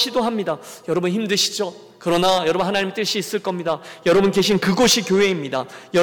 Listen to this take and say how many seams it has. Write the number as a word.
zero